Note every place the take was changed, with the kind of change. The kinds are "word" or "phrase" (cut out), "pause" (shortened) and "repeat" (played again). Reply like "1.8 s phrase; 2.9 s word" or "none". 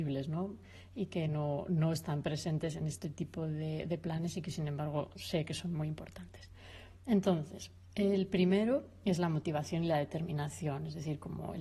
none